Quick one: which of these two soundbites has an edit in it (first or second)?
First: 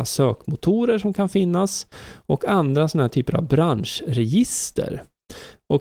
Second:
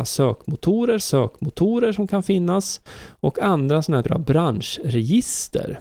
second